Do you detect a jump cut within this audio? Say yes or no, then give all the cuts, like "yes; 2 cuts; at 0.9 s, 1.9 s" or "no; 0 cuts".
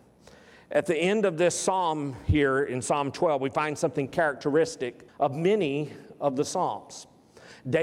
yes; 1 cut; at 5.1 s